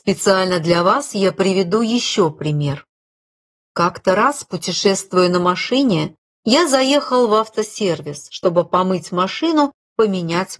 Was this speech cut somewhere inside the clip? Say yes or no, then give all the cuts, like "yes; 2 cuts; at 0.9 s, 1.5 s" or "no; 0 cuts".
no; 0 cuts